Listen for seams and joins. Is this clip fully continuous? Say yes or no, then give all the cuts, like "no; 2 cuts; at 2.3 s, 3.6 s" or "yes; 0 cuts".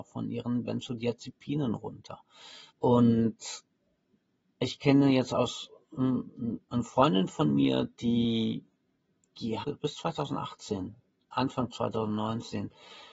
no; 3 cuts; at 2.7 s, 7.9 s, 9.6 s